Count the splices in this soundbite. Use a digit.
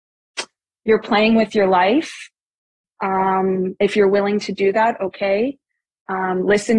0